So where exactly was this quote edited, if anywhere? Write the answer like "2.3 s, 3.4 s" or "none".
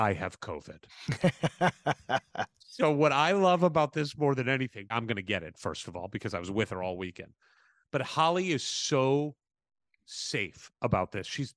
4.9 s